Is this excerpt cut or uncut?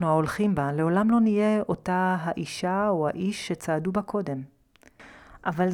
uncut